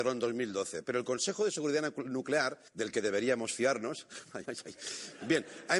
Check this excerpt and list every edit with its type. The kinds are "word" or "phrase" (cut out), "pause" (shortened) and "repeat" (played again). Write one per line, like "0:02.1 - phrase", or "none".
0:02.7 - pause
0:04.4 - word